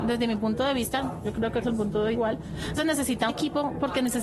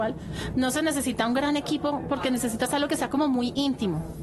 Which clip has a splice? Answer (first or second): first